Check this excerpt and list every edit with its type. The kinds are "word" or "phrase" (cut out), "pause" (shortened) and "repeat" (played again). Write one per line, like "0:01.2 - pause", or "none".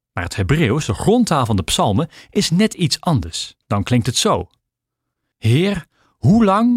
0:03.6 - pause